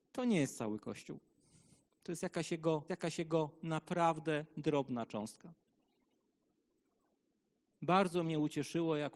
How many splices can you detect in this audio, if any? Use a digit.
1